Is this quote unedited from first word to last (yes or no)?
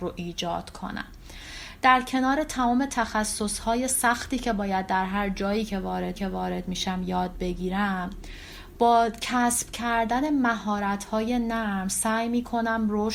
no